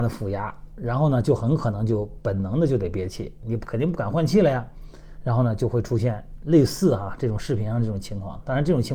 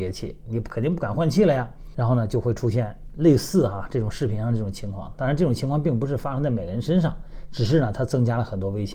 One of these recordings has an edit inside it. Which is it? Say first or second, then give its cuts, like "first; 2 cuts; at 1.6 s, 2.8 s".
second; 1 cut; at 1.9 s